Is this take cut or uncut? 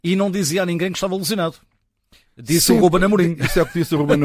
uncut